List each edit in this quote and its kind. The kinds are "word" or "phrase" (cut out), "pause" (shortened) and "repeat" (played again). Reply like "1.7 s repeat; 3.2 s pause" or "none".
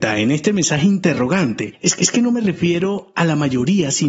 2.0 s repeat